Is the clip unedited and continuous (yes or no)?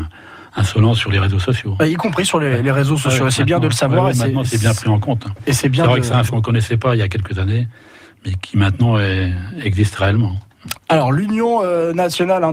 no